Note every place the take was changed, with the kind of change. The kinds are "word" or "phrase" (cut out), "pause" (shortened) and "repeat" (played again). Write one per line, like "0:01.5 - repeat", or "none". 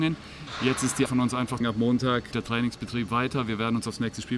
0:01.1 - word
0:01.6 - phrase
0:02.3 - word